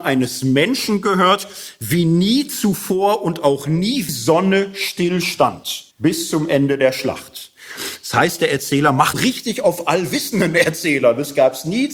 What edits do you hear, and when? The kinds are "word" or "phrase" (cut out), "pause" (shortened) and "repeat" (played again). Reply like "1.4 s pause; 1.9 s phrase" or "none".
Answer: 4.1 s phrase; 5.9 s pause; 9.1 s word